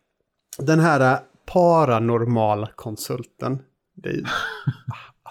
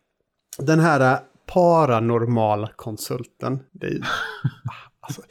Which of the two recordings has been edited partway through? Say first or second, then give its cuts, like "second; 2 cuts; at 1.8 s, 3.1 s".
second; 1 cut; at 3.7 s